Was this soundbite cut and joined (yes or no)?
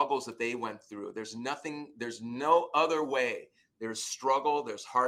no